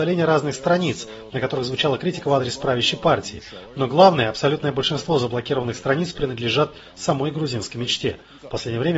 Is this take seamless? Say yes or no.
yes